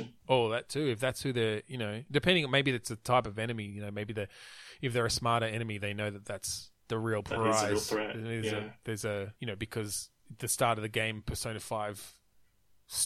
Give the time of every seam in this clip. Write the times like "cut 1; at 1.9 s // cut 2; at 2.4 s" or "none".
cut 1; at 6.8 s // cut 2; at 9.4 s

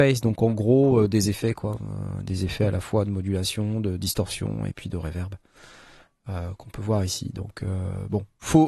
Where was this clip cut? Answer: none

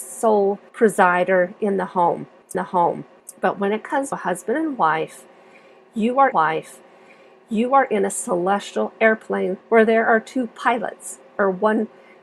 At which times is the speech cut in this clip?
cut 1; at 2.5 s // cut 2; at 4.1 s // cut 3; at 6.3 s // cut 4; at 9.6 s

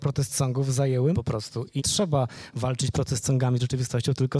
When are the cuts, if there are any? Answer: cut 1; at 1.1 s // cut 2; at 1.8 s

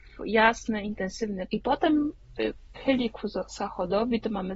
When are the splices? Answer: cut 1; at 1.5 s // cut 2; at 2.8 s

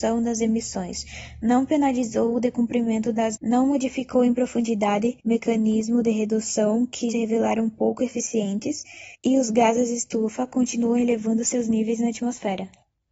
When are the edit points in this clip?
cut 1; at 3.4 s // cut 2; at 5.2 s // cut 3; at 7.1 s // cut 4; at 9.2 s

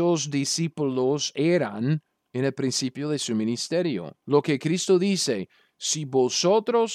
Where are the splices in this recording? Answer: cut 1; at 2.2 s // cut 2; at 4.2 s

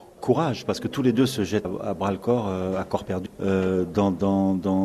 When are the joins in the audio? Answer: cut 1; at 1.6 s // cut 2; at 3.3 s

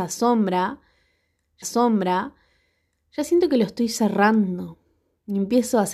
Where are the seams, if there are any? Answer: cut 1; at 1.6 s

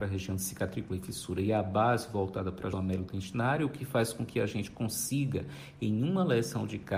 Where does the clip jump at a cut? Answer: cut 1; at 2.7 s

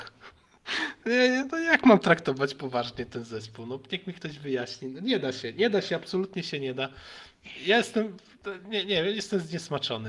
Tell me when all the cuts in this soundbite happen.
none

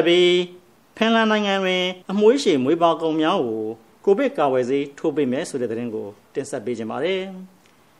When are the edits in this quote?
cut 1; at 2.0 s

